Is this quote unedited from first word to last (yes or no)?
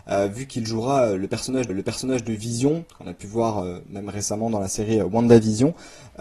no